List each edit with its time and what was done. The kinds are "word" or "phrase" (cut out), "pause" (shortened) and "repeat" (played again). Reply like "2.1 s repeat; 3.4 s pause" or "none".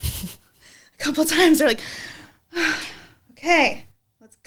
none